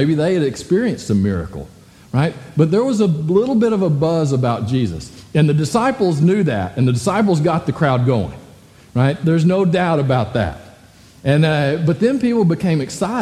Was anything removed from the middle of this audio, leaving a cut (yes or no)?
no